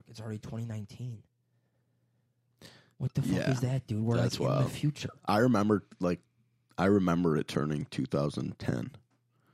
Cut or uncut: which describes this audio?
uncut